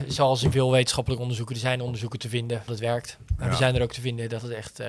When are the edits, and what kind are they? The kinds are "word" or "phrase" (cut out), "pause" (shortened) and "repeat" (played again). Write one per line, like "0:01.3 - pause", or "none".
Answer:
0:02.7 - word